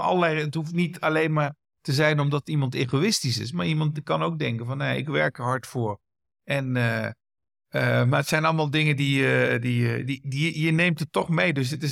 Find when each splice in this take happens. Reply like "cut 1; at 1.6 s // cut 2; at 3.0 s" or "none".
none